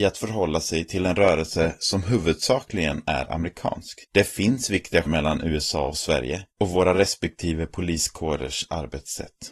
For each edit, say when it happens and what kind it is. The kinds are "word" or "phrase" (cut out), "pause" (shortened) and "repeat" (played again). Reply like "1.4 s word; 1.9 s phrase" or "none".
4.0 s pause; 5.1 s word; 6.5 s pause